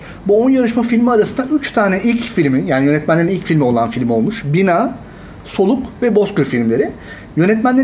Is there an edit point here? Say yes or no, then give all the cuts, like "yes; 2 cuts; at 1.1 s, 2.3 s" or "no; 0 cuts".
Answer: no; 0 cuts